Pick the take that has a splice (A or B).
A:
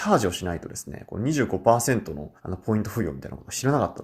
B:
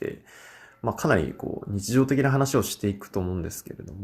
A